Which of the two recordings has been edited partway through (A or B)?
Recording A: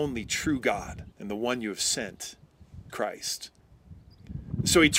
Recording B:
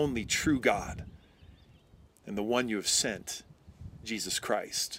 A